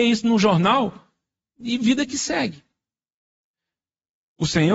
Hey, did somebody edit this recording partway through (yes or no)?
no